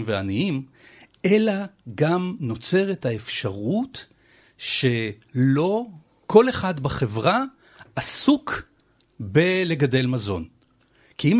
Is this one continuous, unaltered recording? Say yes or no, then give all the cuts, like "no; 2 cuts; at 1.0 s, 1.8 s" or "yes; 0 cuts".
yes; 0 cuts